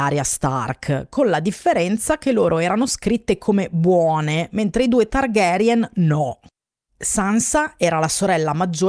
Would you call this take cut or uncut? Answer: uncut